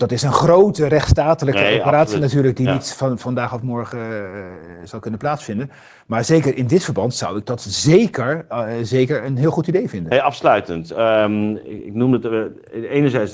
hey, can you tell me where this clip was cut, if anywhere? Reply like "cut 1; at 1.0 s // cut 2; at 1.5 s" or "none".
none